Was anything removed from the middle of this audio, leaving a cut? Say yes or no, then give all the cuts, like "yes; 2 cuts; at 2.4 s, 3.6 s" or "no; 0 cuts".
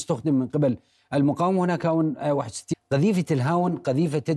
yes; 1 cut; at 2.7 s